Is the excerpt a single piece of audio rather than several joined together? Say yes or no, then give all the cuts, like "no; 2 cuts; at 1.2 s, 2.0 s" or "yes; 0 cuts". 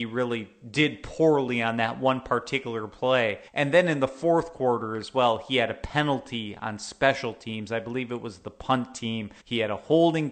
no; 2 cuts; at 3.5 s, 9.4 s